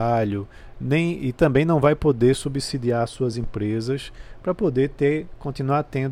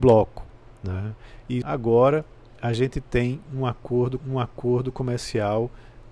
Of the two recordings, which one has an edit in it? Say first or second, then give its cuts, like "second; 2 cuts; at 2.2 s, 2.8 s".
second; 2 cuts; at 1.6 s, 4.2 s